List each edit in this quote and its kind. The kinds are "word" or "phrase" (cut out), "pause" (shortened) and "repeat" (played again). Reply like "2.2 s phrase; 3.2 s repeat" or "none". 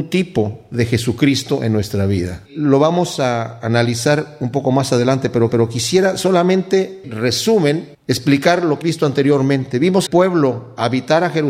2.5 s pause; 5.5 s repeat; 7.0 s phrase; 7.9 s pause; 8.8 s word; 10.1 s phrase